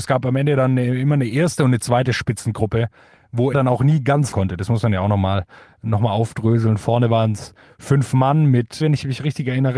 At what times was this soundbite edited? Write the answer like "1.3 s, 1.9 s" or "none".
3.5 s, 4.3 s, 8.8 s